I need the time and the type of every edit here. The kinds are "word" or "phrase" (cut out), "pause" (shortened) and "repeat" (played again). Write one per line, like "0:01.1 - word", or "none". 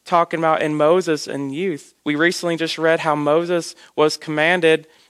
0:02.0 - pause